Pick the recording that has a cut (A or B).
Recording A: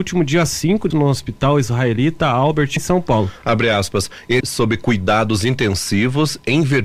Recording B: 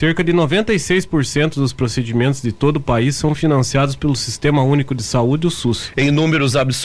A